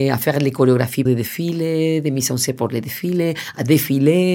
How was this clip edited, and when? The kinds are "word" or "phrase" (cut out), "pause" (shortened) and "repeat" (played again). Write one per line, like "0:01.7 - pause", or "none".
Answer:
0:01.1 - word